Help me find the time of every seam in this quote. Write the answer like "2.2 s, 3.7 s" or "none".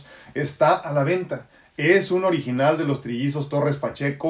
none